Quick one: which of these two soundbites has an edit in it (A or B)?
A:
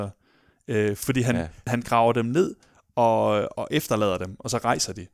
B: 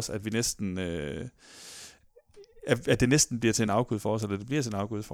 A